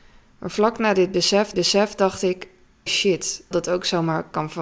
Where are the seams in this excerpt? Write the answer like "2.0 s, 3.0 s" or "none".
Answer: 1.5 s, 2.9 s, 3.5 s